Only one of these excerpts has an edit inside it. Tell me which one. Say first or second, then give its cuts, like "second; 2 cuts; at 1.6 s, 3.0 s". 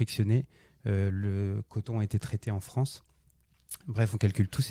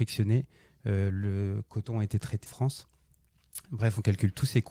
second; 1 cut; at 2.5 s